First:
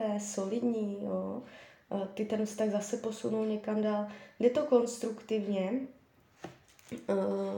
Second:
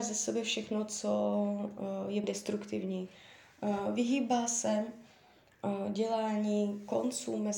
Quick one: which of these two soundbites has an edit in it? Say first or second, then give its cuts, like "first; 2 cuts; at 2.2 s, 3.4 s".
second; 1 cut; at 2.2 s